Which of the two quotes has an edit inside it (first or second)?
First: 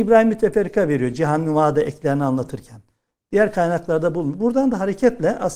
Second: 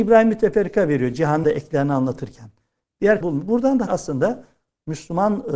second